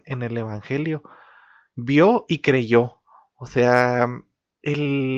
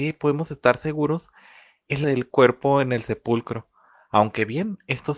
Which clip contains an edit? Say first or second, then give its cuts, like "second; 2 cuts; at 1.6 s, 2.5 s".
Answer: second; 1 cut; at 2.0 s